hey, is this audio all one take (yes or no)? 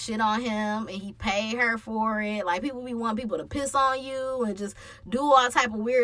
yes